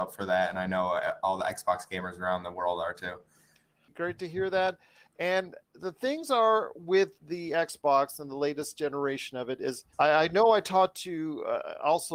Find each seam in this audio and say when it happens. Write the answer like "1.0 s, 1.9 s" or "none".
7.2 s, 9.9 s